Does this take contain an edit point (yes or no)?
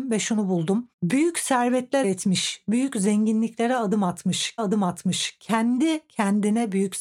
yes